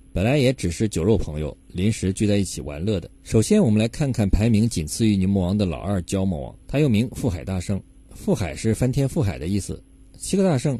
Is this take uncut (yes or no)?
no